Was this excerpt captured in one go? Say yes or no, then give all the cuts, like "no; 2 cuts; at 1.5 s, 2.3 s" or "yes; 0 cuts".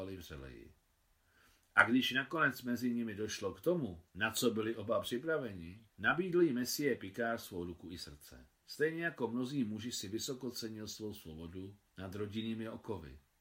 no; 4 cuts; at 4.1 s, 5.9 s, 8.6 s, 11.9 s